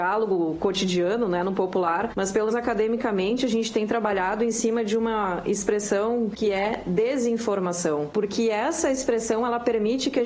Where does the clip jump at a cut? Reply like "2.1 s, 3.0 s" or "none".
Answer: 2.5 s